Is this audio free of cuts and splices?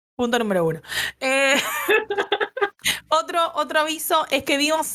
yes; 0 cuts

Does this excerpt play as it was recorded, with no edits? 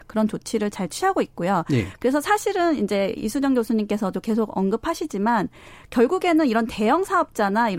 yes; 0 cuts

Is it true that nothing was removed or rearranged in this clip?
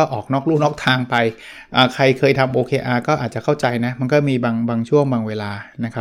yes; 0 cuts

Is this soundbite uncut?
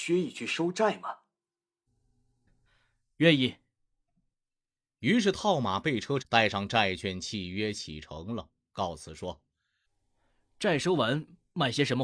no; 1 cut; at 6.2 s

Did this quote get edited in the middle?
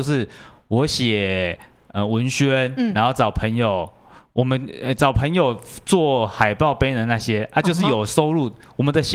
no; 0 cuts

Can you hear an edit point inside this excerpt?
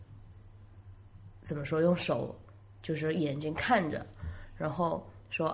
no; 0 cuts

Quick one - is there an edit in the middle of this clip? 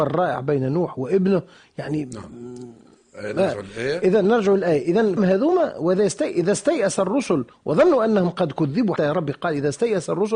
yes; 2 cuts; at 5.2 s, 9.0 s

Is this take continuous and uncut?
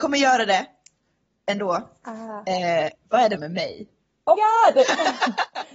no; 2 cuts; at 3.4 s, 4.4 s

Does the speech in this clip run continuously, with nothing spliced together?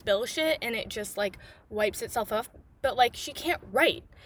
yes; 0 cuts

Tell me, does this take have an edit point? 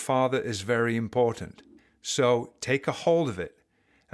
yes; 1 cut; at 1.8 s

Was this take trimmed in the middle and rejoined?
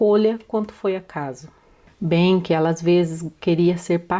no; 0 cuts

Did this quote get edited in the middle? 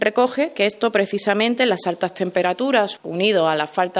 no; 0 cuts

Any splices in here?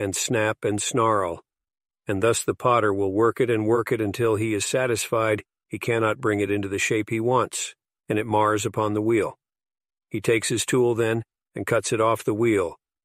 no; 0 cuts

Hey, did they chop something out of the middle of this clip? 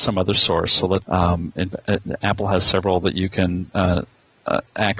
yes; 1 cut; at 1.0 s

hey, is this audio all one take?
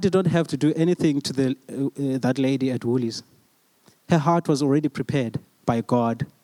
yes; 0 cuts

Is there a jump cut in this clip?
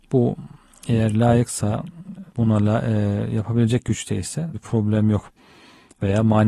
yes; 2 cuts; at 2.3 s, 4.5 s

